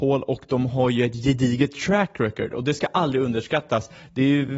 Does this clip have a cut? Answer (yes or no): no